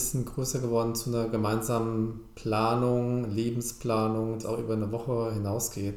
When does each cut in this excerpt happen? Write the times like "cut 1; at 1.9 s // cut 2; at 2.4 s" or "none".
cut 1; at 4.4 s

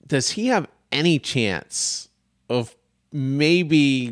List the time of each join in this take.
none

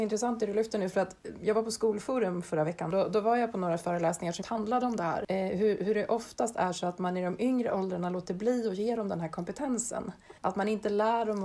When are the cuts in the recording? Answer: cut 1; at 4.4 s // cut 2; at 10.4 s

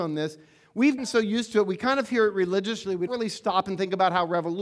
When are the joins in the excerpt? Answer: cut 1; at 1.0 s // cut 2; at 3.1 s

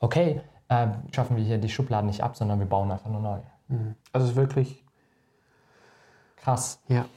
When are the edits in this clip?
cut 1; at 1.1 s // cut 2; at 4.0 s

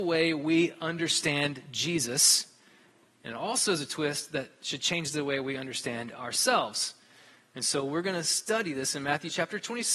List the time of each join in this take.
none

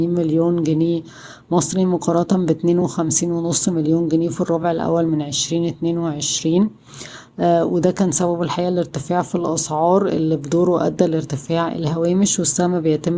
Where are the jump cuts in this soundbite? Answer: none

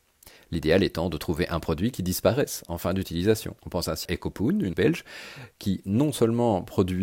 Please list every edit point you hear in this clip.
cut 1; at 3.6 s // cut 2; at 4.1 s // cut 3; at 4.7 s

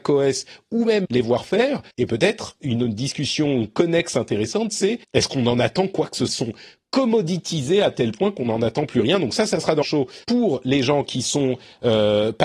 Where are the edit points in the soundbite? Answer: cut 1; at 1.0 s // cut 2; at 1.9 s // cut 3; at 2.6 s // cut 4; at 5.0 s // cut 5; at 6.3 s // cut 6; at 9.8 s // cut 7; at 10.2 s

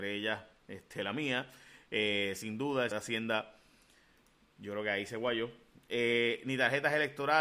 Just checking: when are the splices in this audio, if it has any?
cut 1; at 2.9 s

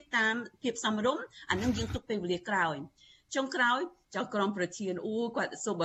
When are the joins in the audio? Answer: none

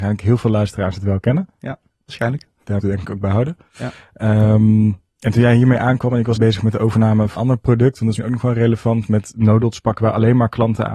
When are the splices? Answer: cut 1; at 1.9 s // cut 2; at 2.8 s // cut 3; at 6.4 s // cut 4; at 7.4 s // cut 5; at 8.2 s

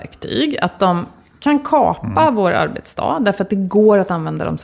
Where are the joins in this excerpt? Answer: none

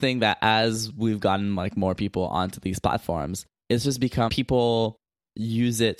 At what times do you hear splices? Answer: cut 1; at 4.3 s

